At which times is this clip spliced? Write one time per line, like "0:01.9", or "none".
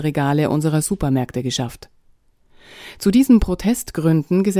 none